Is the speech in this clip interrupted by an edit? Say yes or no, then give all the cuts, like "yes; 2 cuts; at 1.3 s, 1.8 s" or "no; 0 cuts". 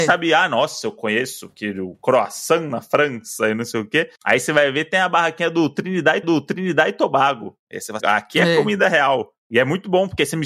yes; 3 cuts; at 4.2 s, 6.2 s, 8.0 s